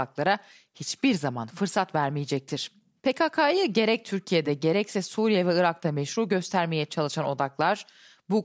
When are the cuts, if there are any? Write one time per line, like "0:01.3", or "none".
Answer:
none

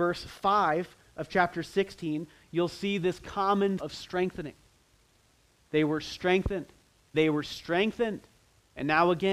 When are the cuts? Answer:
0:03.8
0:07.1

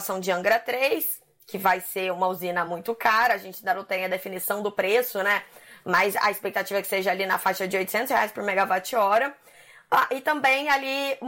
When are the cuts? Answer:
none

